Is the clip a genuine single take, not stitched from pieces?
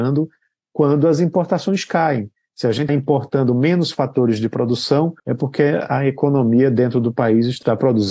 no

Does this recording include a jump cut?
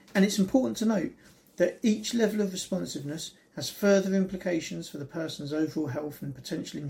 no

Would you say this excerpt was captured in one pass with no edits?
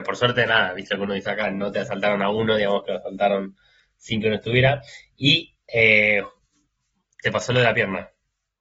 yes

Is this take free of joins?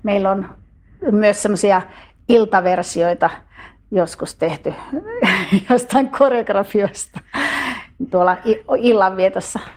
yes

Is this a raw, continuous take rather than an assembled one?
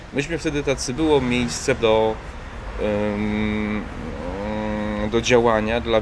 no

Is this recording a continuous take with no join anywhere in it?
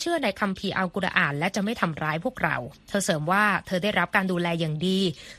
no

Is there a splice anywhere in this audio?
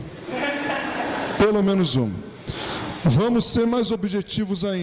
no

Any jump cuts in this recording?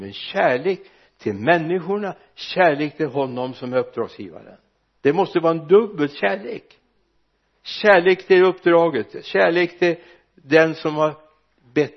yes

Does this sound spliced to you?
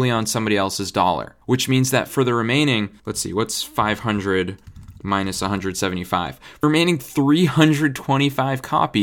yes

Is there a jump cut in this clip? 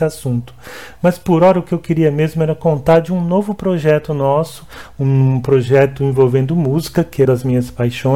yes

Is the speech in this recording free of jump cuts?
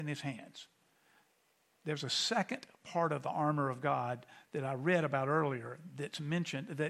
yes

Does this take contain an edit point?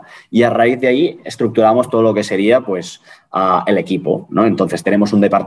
no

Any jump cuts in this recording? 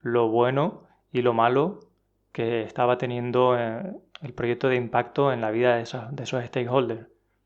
no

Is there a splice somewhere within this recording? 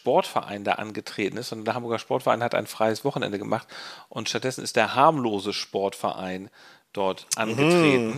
no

